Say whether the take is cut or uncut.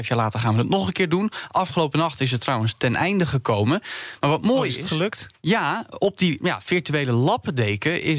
cut